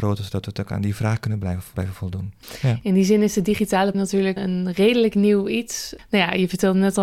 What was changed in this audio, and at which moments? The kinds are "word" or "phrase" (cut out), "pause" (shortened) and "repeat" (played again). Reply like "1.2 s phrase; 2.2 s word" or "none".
1.7 s word; 3.9 s word; 4.4 s word